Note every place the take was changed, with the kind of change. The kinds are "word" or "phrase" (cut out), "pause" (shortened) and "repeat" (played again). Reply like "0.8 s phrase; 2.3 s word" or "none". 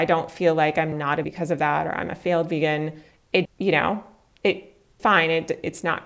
0.9 s word; 1.2 s word; 3.4 s word; 5.0 s word